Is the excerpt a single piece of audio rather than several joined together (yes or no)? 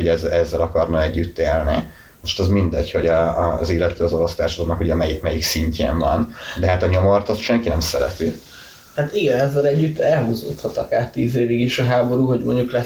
yes